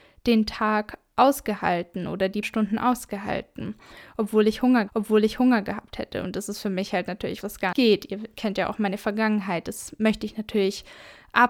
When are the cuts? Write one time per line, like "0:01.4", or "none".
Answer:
0:02.4
0:04.9
0:07.4
0:07.7